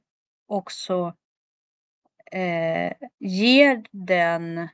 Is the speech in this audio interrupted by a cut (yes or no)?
yes